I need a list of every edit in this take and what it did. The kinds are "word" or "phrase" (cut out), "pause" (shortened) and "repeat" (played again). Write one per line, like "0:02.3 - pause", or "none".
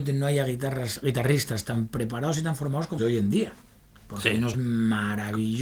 0:03.0 - word
0:04.5 - word